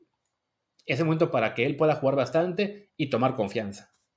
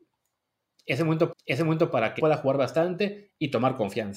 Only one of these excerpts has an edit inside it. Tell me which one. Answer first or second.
second